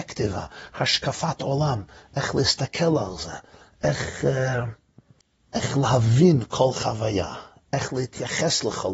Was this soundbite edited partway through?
no; 0 cuts

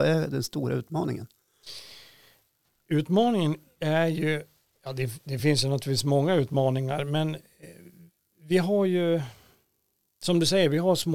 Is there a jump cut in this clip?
no; 0 cuts

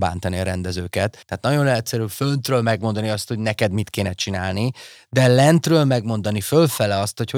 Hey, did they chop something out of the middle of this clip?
yes; 1 cut; at 1.2 s

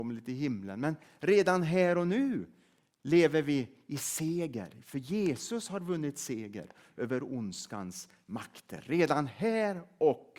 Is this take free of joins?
yes; 0 cuts

